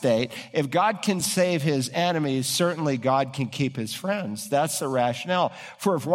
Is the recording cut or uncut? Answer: uncut